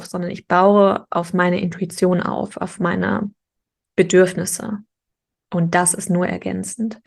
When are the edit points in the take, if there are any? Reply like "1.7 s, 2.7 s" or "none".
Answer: none